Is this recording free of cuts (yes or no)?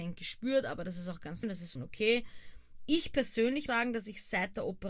no